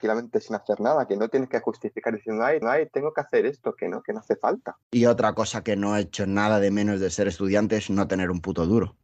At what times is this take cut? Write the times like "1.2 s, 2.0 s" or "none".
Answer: 2.6 s, 4.8 s